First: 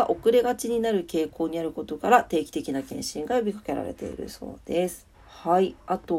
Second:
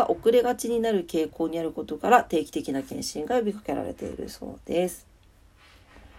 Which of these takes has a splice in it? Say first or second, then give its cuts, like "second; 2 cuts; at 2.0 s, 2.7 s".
first; 1 cut; at 5.1 s